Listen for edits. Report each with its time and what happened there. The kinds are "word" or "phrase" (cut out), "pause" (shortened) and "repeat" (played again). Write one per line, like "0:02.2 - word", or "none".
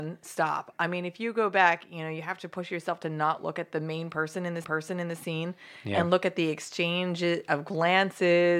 0:04.6 - repeat